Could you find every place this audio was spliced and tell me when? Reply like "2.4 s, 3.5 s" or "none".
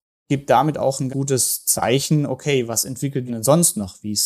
1.1 s, 3.3 s